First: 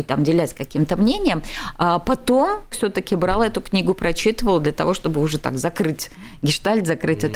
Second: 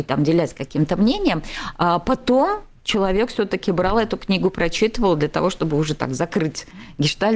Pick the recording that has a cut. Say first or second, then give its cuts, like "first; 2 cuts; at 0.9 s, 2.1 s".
first; 1 cut; at 2.7 s